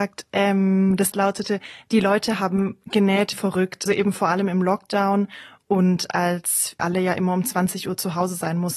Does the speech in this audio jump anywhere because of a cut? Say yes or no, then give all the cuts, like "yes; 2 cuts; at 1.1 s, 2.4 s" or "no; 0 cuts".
yes; 4 cuts; at 1.1 s, 3.3 s, 3.9 s, 6.8 s